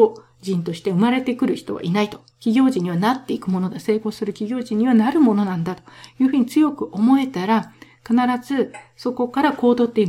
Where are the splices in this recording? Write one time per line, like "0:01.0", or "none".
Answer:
0:02.3